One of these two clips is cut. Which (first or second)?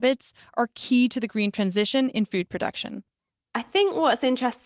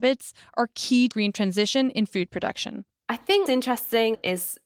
second